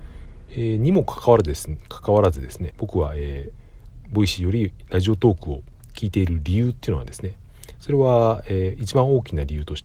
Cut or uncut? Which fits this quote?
cut